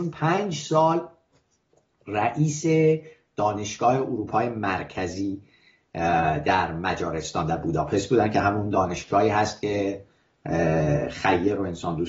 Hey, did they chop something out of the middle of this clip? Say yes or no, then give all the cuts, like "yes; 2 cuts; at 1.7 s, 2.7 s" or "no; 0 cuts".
no; 0 cuts